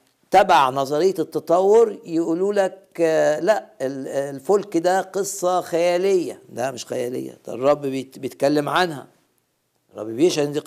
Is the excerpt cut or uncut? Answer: uncut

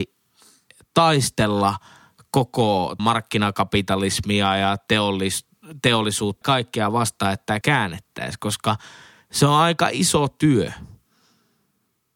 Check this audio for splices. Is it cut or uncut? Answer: cut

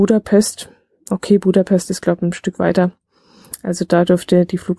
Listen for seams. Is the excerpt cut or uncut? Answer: uncut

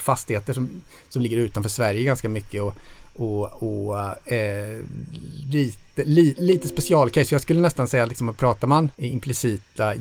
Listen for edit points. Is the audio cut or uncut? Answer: cut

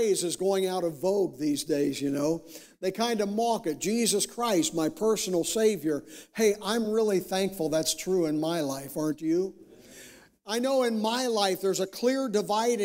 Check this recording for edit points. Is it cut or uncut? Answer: uncut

